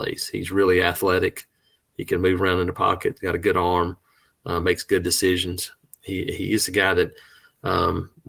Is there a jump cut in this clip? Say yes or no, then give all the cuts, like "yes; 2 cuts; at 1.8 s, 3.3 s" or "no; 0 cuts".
no; 0 cuts